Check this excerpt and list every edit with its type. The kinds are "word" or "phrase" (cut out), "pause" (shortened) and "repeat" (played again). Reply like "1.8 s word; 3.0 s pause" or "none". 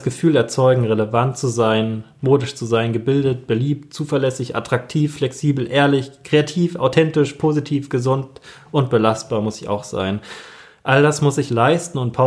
none